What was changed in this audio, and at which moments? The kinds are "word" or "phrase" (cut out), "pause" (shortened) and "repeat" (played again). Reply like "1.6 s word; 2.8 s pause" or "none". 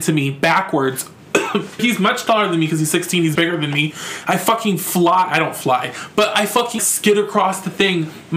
1.8 s word; 3.4 s word; 6.8 s word